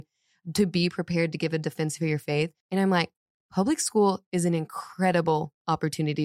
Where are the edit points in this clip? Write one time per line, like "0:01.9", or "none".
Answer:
0:02.6